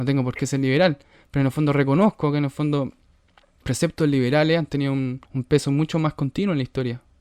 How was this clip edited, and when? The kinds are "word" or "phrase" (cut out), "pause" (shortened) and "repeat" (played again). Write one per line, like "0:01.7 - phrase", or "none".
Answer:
0:03.6 - phrase
0:05.3 - pause